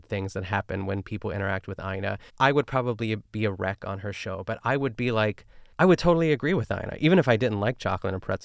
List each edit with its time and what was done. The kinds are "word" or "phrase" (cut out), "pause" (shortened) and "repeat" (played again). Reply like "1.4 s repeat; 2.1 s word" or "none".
2.3 s pause; 5.7 s pause